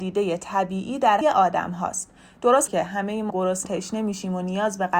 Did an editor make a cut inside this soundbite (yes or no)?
yes